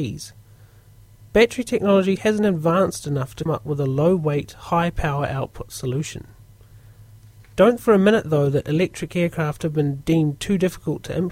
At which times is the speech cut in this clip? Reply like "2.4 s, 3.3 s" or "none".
2.2 s, 3.5 s, 7.8 s